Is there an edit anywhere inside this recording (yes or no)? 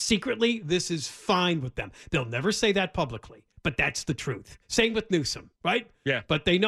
yes